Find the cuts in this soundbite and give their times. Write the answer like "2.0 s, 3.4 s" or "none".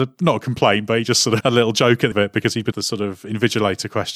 1.4 s, 2.1 s, 2.7 s